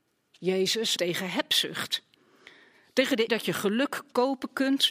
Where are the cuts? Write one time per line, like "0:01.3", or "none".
0:01.0
0:03.3